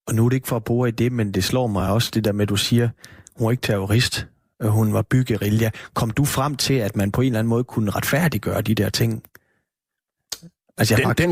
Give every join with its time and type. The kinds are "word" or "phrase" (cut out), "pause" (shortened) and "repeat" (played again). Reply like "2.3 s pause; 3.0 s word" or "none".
none